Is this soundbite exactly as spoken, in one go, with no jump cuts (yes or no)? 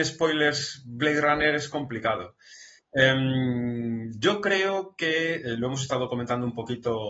yes